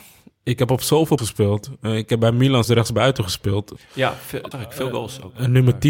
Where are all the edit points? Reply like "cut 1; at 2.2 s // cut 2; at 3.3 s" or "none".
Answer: cut 1; at 1.2 s // cut 2; at 2.6 s // cut 3; at 4.5 s